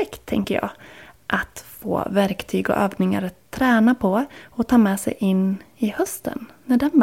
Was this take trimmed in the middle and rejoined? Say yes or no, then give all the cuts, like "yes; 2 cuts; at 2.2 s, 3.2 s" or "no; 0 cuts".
no; 0 cuts